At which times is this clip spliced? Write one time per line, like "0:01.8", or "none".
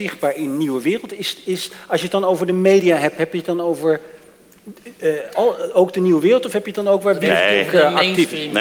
0:05.3